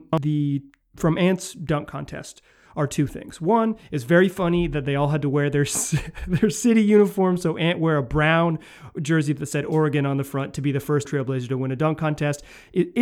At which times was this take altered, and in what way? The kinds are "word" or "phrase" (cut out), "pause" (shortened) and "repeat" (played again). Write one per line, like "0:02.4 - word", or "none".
0:11.0 - word